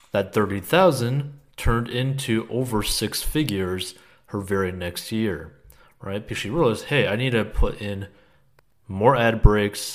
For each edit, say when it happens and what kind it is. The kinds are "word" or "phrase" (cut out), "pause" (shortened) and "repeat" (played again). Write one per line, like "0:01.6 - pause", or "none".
none